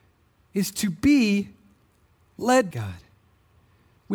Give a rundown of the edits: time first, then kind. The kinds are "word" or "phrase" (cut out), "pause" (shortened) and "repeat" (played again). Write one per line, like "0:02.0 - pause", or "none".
0:02.7 - word